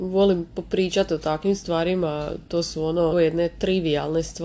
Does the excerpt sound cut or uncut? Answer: cut